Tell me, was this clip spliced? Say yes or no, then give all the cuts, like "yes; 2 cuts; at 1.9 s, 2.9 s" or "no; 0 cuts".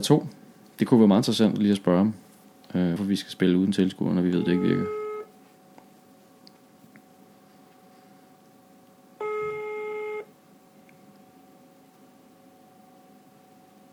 yes; 1 cut; at 3.0 s